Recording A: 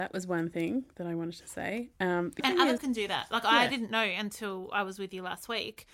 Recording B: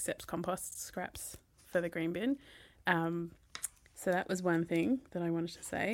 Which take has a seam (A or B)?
A